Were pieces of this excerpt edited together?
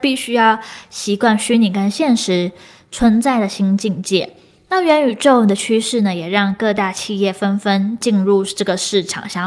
no; 0 cuts

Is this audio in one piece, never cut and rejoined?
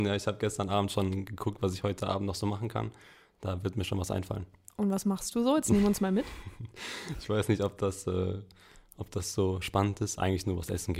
yes; 0 cuts

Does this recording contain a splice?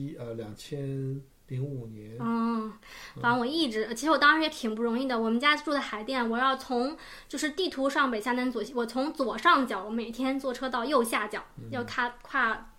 no; 0 cuts

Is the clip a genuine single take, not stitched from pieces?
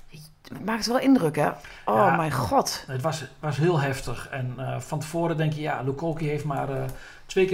yes; 0 cuts

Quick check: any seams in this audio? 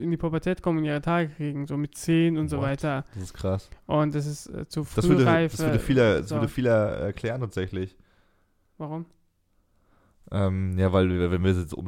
no; 0 cuts

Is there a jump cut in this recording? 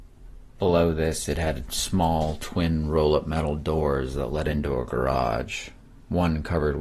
no; 0 cuts

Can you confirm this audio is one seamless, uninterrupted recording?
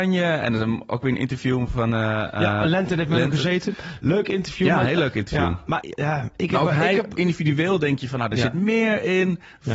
no; 1 cut; at 5.8 s

